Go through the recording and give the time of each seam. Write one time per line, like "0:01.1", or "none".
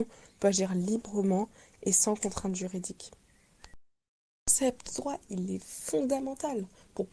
0:04.9